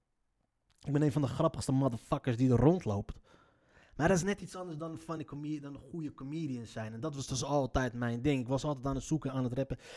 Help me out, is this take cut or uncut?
uncut